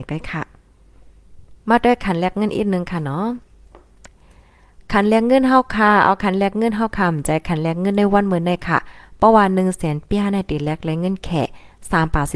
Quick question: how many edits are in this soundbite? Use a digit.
1